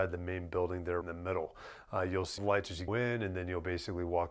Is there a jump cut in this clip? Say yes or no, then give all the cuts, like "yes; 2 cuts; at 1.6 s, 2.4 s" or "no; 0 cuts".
yes; 3 cuts; at 1.0 s, 2.4 s, 2.9 s